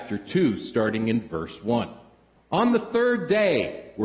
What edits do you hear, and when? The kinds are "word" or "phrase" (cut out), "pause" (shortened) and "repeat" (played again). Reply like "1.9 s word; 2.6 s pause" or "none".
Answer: 2.4 s pause